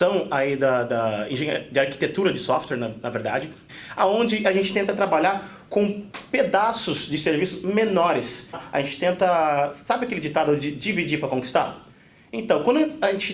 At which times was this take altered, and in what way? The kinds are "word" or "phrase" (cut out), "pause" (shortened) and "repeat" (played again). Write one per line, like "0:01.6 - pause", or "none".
none